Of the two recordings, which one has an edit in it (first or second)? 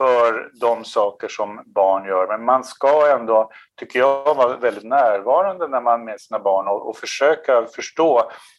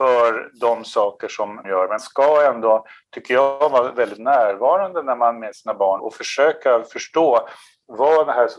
second